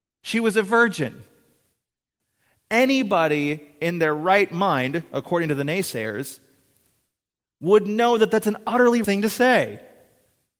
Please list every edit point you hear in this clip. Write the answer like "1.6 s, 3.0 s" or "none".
9.0 s